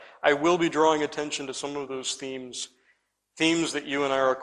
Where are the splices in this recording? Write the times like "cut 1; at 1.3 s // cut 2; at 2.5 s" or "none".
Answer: none